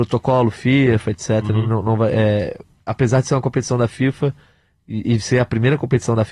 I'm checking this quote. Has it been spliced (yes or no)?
no